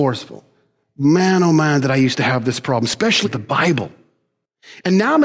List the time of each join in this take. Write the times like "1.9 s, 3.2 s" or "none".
3.2 s